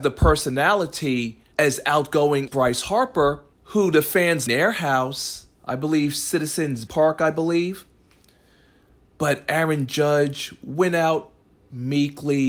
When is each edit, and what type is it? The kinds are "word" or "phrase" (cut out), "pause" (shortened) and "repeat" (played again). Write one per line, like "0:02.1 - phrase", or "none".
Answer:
0:01.5 - pause
0:02.5 - word
0:03.5 - pause
0:04.5 - phrase
0:05.6 - pause
0:06.9 - word

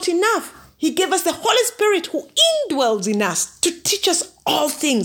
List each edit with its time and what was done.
none

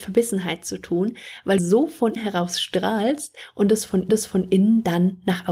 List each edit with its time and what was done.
0:01.6 - phrase
0:02.2 - word
0:04.1 - repeat

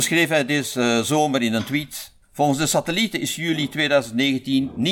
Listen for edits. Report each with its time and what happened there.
0:02.2 - pause

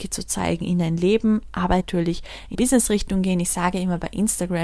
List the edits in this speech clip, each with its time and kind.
0:01.8 - phrase
0:02.5 - word

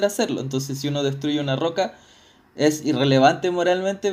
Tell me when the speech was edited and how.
none

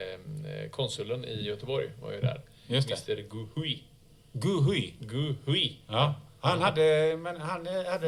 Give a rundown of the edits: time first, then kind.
none

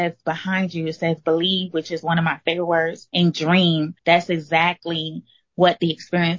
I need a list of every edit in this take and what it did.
0:03.1 - word
0:04.0 - pause

